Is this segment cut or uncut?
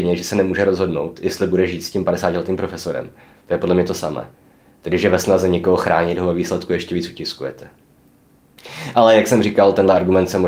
uncut